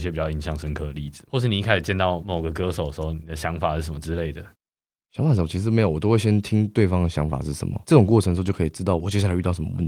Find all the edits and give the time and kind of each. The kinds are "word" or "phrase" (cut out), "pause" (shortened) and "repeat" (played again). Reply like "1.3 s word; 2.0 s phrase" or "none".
none